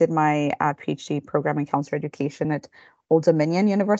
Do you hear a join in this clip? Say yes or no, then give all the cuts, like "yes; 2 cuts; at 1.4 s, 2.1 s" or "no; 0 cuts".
no; 0 cuts